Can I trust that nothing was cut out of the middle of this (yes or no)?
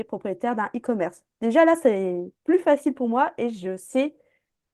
yes